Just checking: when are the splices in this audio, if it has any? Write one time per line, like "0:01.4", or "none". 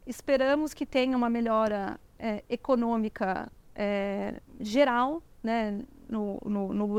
none